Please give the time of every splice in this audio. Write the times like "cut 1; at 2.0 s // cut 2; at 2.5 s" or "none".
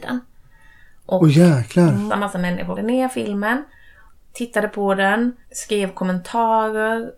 cut 1; at 2.1 s // cut 2; at 2.8 s // cut 3; at 4.1 s // cut 4; at 5.4 s

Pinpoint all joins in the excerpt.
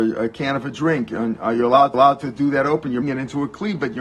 cut 1; at 1.9 s // cut 2; at 3.0 s

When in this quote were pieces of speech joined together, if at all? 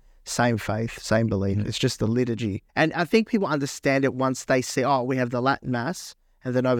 cut 1; at 2.7 s

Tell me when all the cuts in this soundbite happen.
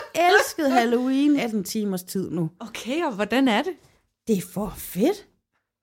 cut 1; at 1.4 s

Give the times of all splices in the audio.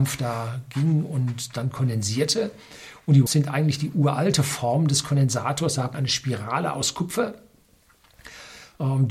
cut 1; at 3.3 s // cut 2; at 5.9 s

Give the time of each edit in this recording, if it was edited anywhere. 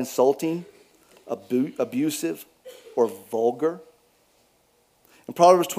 none

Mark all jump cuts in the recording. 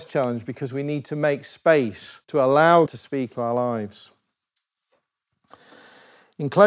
cut 1; at 2.2 s // cut 2; at 2.9 s // cut 3; at 3.3 s

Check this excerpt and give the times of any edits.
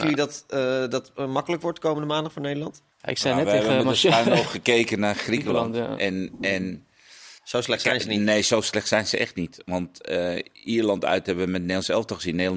cut 1; at 2.9 s // cut 2; at 7.4 s

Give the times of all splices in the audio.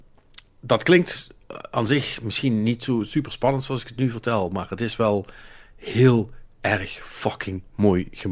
none

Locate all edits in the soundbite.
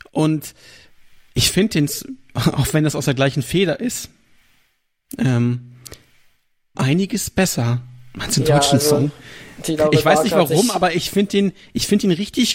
cut 1; at 6.7 s

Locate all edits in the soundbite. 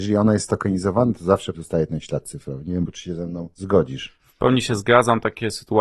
cut 1; at 1.5 s // cut 2; at 2.9 s

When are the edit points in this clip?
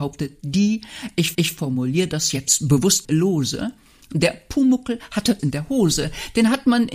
cut 1; at 1.3 s // cut 2; at 3.0 s // cut 3; at 5.4 s

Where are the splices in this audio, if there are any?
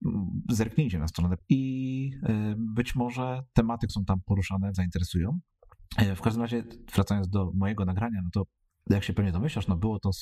cut 1; at 1.4 s // cut 2; at 3.9 s // cut 3; at 4.7 s

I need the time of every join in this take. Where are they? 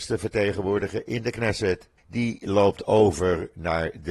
cut 1; at 2.0 s

